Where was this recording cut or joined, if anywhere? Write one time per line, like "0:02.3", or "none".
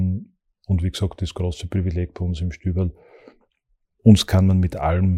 none